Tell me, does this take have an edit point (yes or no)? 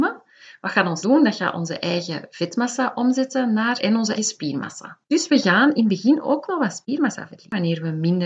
yes